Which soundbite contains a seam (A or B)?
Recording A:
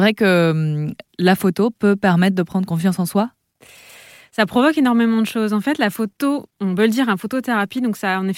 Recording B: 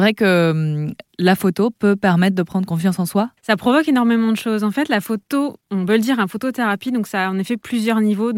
B